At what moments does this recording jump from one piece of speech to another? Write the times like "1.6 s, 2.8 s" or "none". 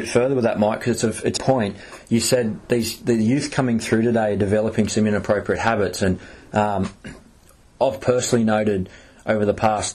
1.4 s